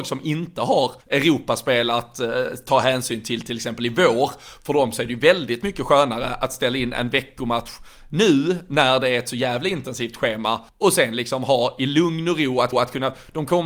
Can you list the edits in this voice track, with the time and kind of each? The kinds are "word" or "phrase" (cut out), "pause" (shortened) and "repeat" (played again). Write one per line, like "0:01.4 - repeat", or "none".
0:01.0 - pause
0:10.7 - pause
0:12.7 - repeat